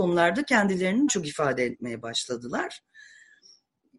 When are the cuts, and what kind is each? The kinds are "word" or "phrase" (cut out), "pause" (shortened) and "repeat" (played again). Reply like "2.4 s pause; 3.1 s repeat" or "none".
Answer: 1.1 s word